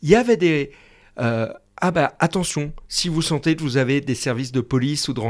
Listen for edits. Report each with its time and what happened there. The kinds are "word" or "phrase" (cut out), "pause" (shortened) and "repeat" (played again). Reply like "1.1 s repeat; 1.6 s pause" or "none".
none